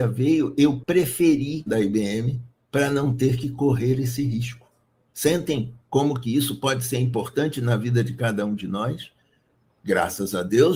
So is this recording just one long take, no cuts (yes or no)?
no